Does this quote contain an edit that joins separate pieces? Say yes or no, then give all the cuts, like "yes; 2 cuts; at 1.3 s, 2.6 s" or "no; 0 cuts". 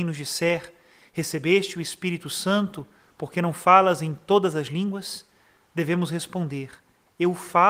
no; 0 cuts